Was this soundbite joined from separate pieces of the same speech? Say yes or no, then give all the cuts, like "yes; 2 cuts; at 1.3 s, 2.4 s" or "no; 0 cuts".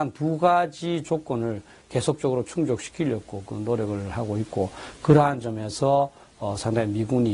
no; 0 cuts